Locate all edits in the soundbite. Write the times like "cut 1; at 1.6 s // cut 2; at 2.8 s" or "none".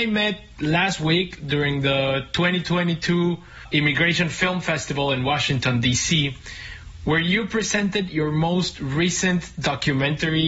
none